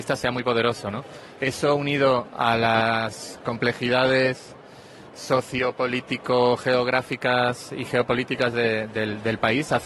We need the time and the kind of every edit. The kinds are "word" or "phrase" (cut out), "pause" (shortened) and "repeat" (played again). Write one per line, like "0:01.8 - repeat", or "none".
none